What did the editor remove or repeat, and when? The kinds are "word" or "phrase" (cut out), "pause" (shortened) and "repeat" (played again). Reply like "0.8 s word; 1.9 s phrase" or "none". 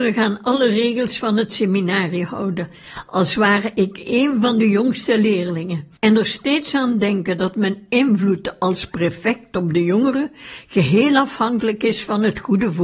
6.0 s pause